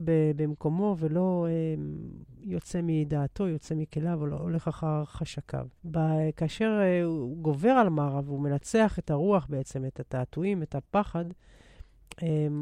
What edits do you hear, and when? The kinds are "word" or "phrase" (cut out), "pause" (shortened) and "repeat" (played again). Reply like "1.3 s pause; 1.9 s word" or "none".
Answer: 5.8 s pause

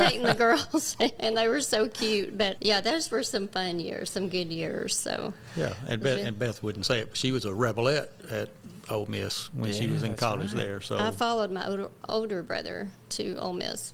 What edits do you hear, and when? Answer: 1.2 s word; 2.6 s word

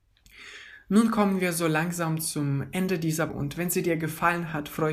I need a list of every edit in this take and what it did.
3.3 s word

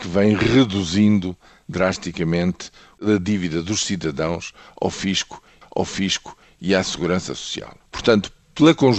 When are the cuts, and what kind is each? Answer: 5.6 s repeat; 7.8 s pause

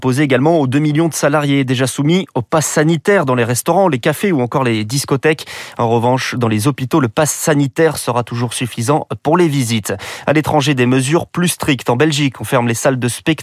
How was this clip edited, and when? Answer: none

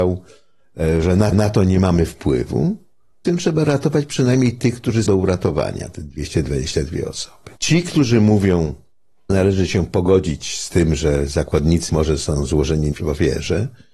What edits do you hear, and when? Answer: 1.3 s repeat; 3.2 s phrase; 5.1 s word; 7.6 s pause; 9.3 s word; 11.9 s word

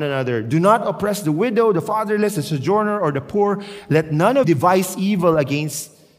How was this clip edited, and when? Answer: 4.4 s word

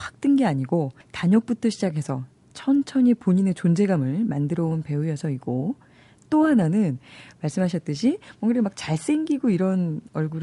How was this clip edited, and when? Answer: 1.0 s pause

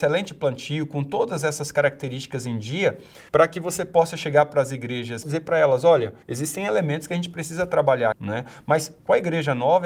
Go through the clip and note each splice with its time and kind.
3.3 s pause; 5.2 s phrase; 6.2 s pause; 8.1 s word

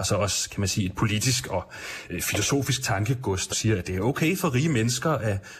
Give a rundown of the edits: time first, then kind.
3.5 s word

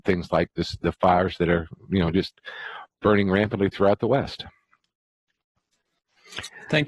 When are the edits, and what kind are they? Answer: none

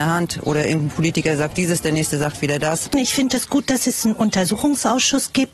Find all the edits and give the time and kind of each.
none

